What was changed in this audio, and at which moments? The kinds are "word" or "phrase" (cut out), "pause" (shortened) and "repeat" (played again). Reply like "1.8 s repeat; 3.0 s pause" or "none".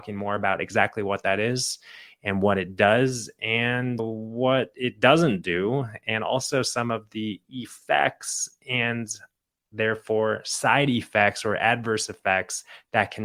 4.0 s word